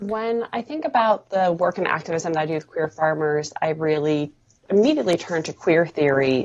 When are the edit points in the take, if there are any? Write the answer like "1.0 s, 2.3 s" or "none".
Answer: none